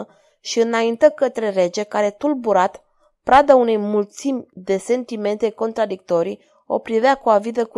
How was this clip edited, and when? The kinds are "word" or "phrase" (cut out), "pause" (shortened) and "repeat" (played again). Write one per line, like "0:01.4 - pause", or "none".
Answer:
none